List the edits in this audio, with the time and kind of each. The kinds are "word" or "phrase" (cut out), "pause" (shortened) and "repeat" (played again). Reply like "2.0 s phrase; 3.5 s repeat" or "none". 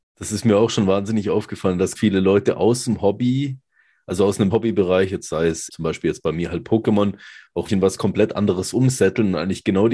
1.9 s word; 4.5 s word; 5.7 s word; 7.7 s word

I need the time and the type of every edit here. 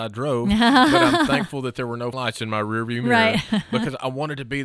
2.1 s word

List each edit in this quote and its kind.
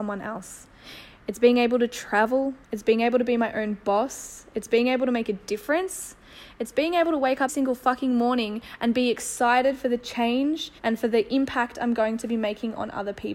2.6 s pause; 7.5 s word; 10.8 s pause

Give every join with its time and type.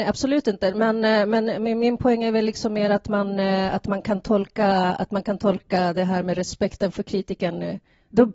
none

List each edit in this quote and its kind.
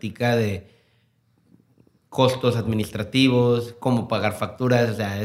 none

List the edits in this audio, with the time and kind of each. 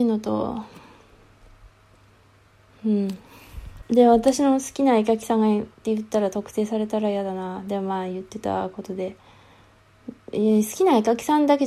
3.9 s pause; 5.7 s pause

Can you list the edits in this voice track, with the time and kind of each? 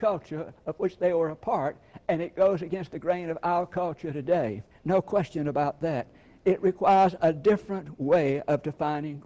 4.7 s pause

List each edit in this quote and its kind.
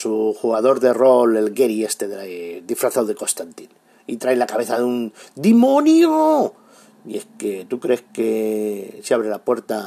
none

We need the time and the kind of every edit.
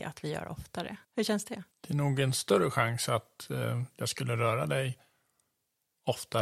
1.0 s pause; 1.7 s pause

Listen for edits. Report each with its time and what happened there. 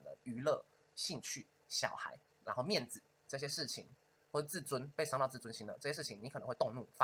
2.3 s pause

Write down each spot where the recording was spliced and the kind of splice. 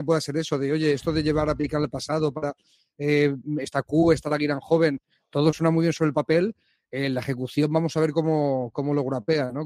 none

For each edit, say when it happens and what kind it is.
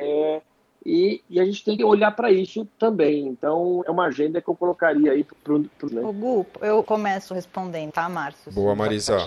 1.8 s word; 3.8 s phrase; 5.3 s word; 5.9 s phrase; 6.8 s word; 7.9 s word

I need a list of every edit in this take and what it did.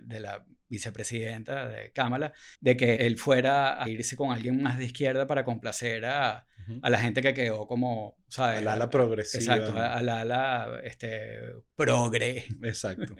2.5 s pause; 3.0 s word; 3.9 s word

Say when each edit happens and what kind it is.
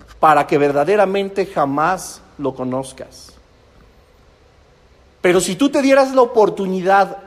none

